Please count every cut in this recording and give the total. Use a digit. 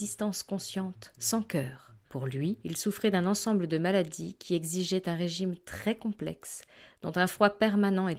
2